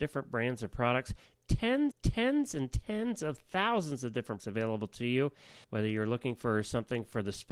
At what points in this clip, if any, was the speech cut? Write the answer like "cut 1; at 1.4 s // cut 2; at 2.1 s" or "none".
cut 1; at 1.9 s // cut 2; at 4.4 s // cut 3; at 5.6 s